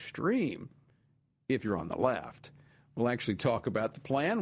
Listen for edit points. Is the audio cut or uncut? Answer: uncut